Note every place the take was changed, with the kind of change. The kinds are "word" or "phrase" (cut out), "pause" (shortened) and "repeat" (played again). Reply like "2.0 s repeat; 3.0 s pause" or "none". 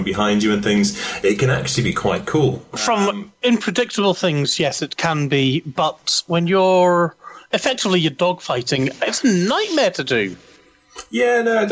none